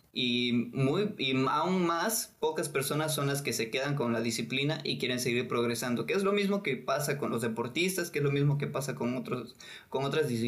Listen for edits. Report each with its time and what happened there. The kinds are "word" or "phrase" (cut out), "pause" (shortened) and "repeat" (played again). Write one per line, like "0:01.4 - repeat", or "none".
none